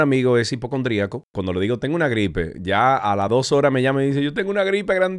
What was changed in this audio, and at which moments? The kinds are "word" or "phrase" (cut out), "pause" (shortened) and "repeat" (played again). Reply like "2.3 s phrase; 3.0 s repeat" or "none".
none